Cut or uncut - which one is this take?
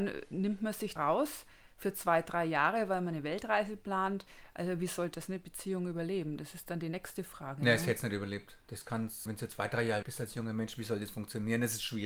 cut